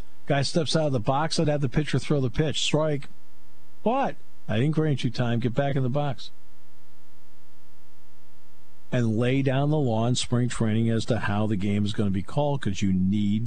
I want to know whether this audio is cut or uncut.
uncut